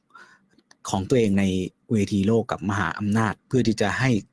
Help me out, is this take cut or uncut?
cut